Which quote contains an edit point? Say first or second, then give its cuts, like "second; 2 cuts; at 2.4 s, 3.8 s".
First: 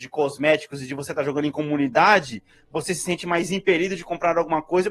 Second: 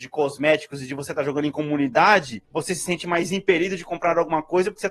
second; 1 cut; at 2.4 s